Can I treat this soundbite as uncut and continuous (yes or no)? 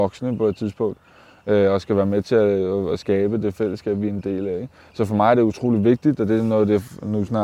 yes